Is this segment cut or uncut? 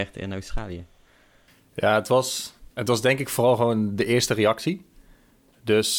cut